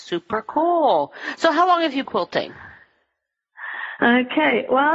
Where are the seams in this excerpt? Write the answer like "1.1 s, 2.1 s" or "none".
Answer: 2.1 s